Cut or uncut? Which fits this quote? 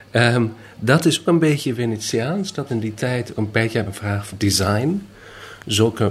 cut